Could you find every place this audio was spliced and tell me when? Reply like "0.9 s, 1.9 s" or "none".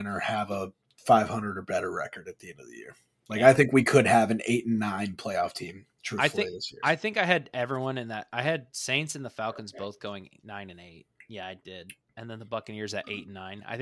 8.7 s

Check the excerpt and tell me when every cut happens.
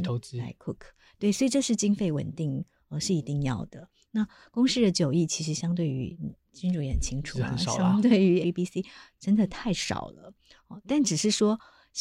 8.4 s

